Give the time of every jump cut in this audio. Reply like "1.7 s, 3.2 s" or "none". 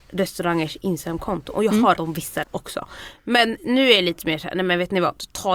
2.0 s, 2.4 s